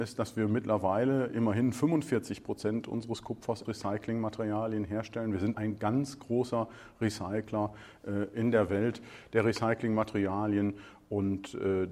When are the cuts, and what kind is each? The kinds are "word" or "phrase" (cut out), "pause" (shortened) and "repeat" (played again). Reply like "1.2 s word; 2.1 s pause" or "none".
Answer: 3.6 s word; 5.5 s word